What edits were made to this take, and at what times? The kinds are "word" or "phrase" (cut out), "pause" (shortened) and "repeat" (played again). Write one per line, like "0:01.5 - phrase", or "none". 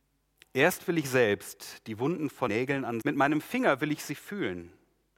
0:02.5 - word
0:03.0 - phrase